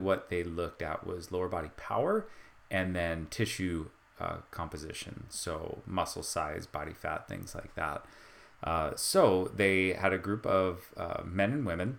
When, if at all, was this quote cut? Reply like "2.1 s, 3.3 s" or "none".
none